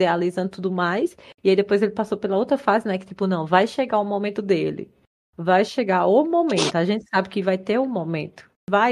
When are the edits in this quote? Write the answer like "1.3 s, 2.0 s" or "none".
none